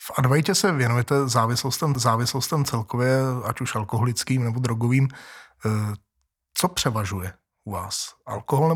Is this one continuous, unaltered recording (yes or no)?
no